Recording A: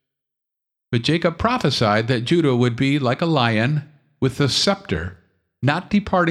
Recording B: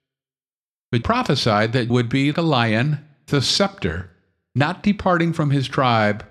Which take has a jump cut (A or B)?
B